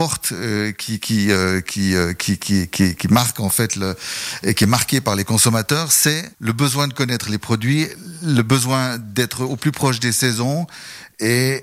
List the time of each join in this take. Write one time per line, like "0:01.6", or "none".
0:06.3